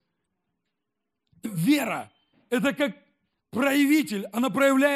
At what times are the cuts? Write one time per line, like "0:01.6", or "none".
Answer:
0:01.4